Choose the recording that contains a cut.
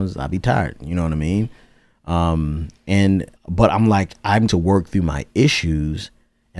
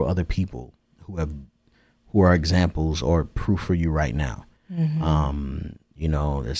first; 2 cuts; at 3.4 s, 4.5 s

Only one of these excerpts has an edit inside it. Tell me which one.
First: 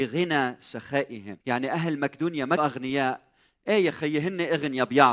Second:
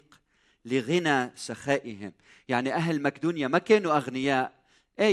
first; 2 cuts; at 1.4 s, 2.6 s

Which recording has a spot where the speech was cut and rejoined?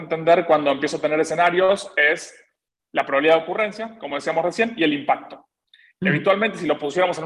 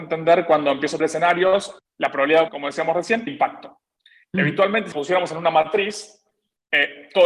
second; 5 cuts; at 1.0 s, 1.8 s, 2.5 s, 3.3 s, 4.9 s

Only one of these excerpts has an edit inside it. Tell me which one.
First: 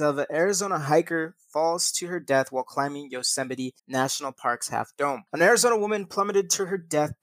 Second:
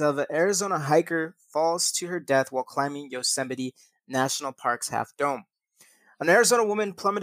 first; 2 cuts; at 3.8 s, 5.3 s

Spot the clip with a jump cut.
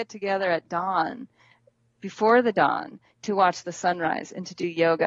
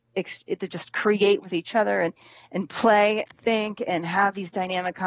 second; 1 cut; at 3.3 s

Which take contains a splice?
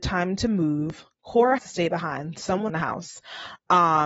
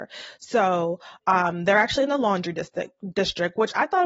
first; 2 cuts; at 1.6 s, 2.7 s

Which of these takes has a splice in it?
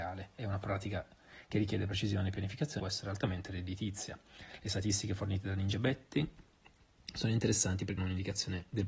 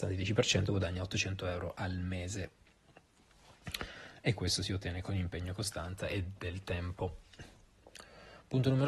first; 2 cuts; at 2.8 s, 8.0 s

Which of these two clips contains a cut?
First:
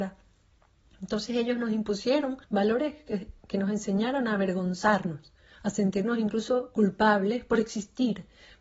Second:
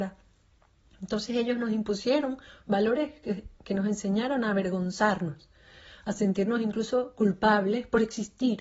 first; 2 cuts; at 2.4 s, 5.5 s

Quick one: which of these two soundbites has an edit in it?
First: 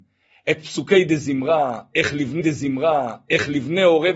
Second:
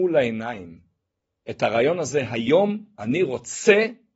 first; 1 cut; at 2.4 s

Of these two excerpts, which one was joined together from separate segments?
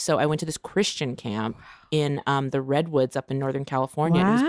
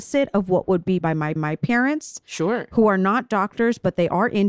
second; 2 cuts; at 1.0 s, 1.4 s

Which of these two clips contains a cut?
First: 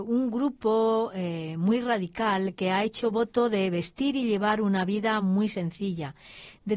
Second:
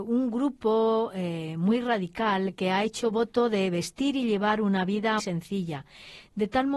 second; 1 cut; at 5.2 s

